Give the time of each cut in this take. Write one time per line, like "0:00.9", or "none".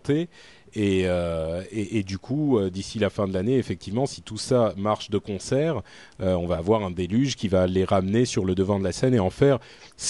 none

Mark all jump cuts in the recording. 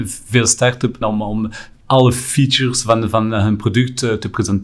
0:01.0

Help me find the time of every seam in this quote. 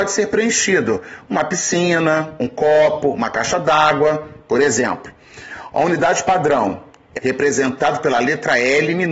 0:07.2

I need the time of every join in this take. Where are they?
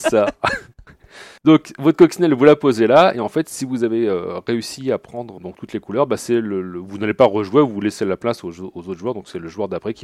0:01.4
0:05.4

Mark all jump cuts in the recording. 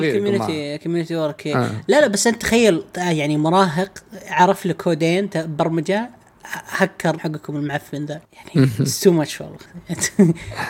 0:07.2
0:08.2

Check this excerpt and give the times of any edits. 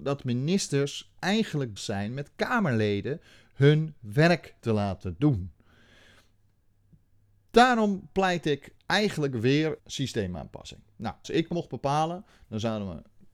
0:01.8
0:04.6
0:08.8
0:09.8
0:11.2

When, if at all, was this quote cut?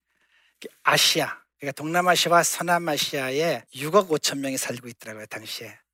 0:03.7

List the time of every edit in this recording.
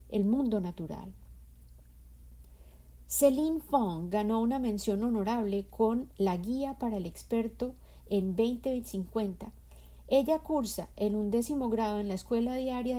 none

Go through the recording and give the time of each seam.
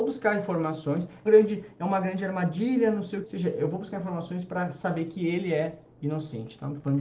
0:01.3
0:03.2

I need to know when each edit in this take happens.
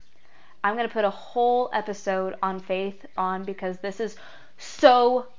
0:03.2

